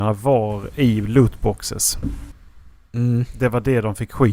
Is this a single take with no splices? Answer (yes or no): yes